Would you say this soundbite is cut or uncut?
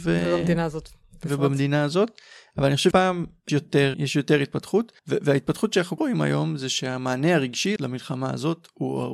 cut